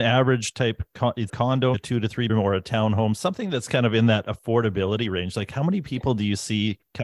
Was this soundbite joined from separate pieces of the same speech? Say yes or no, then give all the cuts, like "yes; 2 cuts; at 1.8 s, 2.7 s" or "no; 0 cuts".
yes; 3 cuts; at 1.3 s, 1.7 s, 2.3 s